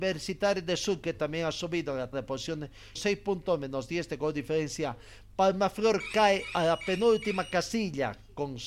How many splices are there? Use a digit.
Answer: 2